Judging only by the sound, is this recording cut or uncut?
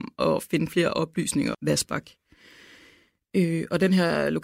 cut